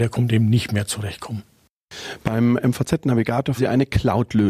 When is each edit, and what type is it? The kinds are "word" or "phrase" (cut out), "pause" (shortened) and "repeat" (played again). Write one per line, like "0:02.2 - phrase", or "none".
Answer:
0:03.6 - word